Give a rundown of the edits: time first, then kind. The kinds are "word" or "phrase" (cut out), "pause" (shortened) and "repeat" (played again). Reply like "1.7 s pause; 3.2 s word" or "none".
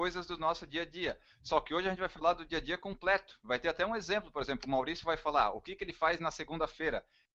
none